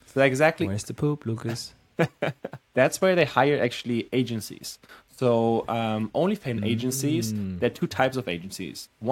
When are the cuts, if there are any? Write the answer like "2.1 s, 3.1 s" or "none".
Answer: 2.6 s